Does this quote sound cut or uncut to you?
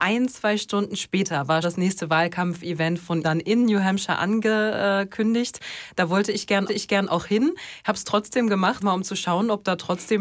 cut